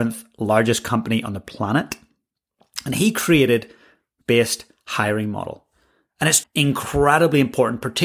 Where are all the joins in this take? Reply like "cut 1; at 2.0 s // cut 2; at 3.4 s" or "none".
cut 1; at 4.2 s // cut 2; at 6.4 s